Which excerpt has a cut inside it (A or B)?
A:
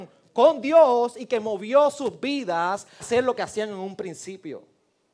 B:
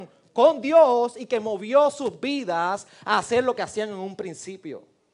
A